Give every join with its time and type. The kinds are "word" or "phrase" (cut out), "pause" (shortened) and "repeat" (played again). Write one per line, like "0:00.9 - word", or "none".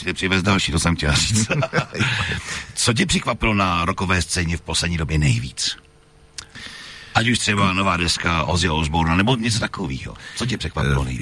none

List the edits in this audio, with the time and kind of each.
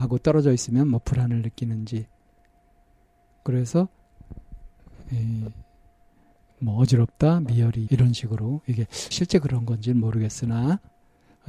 0:07.9 - word
0:09.1 - word

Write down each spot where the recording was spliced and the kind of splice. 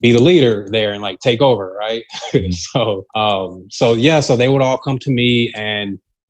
0:03.1 - pause

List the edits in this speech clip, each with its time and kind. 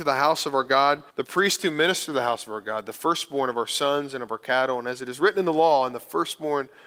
0:01.1 - pause

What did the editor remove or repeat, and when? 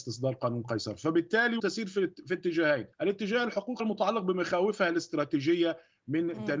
0:01.6 - word
0:02.9 - pause
0:03.8 - word

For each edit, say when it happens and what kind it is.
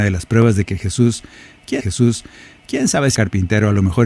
0:01.8 - repeat
0:03.1 - word

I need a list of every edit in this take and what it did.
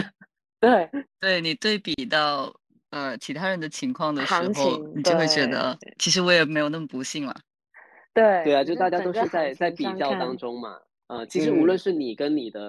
0:01.1 - phrase

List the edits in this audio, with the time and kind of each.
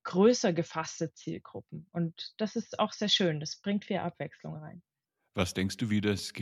0:05.0 - pause

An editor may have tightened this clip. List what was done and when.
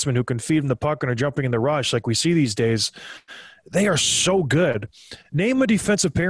none

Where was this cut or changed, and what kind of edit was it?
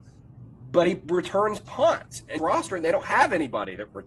0:02.4 - phrase

